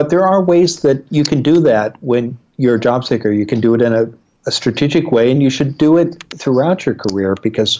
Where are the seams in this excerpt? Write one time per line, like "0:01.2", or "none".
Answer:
none